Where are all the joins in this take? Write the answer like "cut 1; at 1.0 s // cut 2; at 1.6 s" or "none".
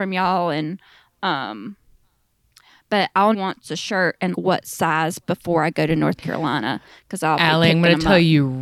cut 1; at 3.3 s // cut 2; at 4.3 s